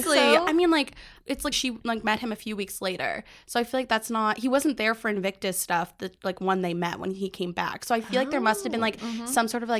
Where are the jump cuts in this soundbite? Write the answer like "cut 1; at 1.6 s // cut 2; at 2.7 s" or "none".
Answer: cut 1; at 1.5 s